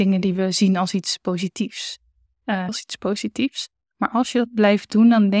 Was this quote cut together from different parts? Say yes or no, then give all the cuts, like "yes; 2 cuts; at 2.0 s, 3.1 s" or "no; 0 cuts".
yes; 1 cut; at 2.7 s